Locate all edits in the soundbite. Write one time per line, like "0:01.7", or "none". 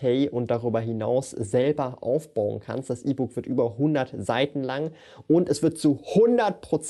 none